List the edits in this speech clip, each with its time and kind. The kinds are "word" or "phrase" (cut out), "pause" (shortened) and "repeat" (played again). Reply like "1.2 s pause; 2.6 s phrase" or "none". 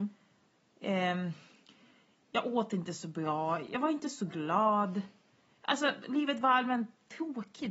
none